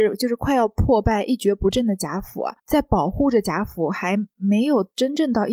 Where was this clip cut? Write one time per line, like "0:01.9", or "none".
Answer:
0:02.6